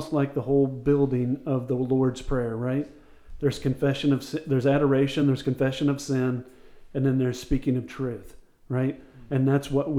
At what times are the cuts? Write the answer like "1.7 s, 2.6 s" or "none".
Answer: none